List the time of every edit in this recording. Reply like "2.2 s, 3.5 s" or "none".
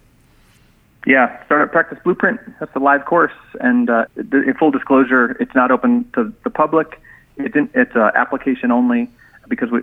4.1 s